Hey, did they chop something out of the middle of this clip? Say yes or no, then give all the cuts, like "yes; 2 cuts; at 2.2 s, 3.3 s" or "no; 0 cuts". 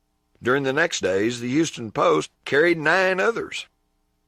yes; 2 cuts; at 1.0 s, 2.3 s